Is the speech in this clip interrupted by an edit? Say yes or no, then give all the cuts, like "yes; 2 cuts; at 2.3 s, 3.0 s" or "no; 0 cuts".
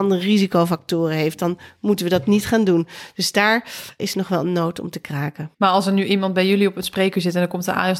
yes; 2 cuts; at 4.0 s, 5.5 s